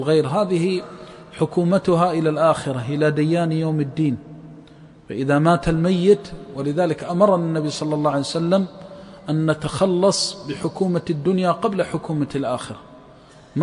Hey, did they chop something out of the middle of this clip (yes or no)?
no